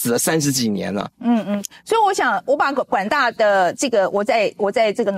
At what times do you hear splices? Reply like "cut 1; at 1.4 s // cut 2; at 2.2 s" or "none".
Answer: cut 1; at 1.1 s